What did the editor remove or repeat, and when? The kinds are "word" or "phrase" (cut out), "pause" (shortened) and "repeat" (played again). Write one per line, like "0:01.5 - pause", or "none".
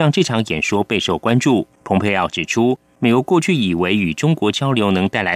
0:01.7 - pause